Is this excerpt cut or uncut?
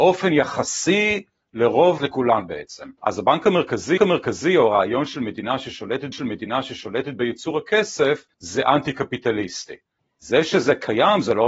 cut